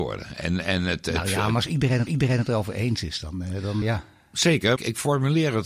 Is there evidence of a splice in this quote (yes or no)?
yes